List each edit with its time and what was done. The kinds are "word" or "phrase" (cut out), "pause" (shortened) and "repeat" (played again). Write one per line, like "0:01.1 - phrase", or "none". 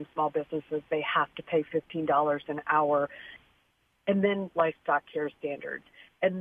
none